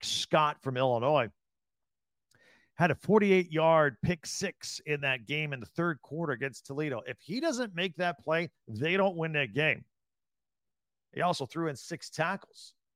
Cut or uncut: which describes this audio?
uncut